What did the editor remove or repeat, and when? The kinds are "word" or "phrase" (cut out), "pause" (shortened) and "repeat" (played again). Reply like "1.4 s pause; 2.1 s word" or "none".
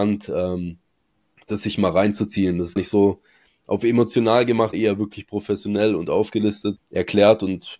2.8 s word; 4.7 s word; 6.8 s word